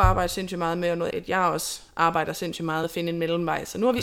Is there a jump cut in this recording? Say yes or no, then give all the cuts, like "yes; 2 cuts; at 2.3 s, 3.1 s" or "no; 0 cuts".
yes; 2 cuts; at 1.1 s, 2.8 s